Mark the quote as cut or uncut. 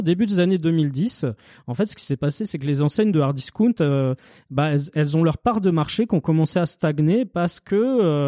uncut